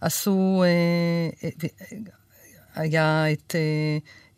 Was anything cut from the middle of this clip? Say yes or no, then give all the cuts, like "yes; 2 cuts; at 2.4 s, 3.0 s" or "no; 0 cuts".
no; 0 cuts